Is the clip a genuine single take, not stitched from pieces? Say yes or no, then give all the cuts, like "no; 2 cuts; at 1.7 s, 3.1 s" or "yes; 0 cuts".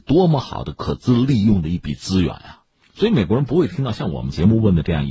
yes; 0 cuts